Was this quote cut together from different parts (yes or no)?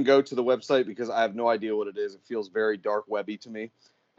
no